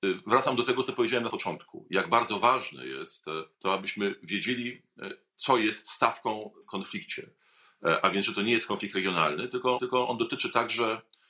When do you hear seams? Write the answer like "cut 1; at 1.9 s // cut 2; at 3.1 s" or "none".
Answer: cut 1; at 1.3 s // cut 2; at 3.5 s // cut 3; at 6.6 s // cut 4; at 9.8 s